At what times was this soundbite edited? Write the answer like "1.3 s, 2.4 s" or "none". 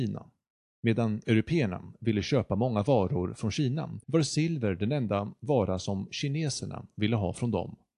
4.0 s